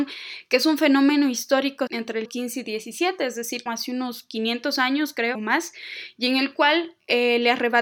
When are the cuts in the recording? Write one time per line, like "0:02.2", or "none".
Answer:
0:01.9
0:02.2
0:03.7
0:05.3